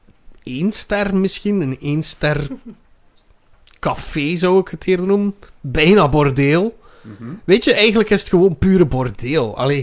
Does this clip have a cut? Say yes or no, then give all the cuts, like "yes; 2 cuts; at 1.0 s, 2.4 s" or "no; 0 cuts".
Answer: no; 0 cuts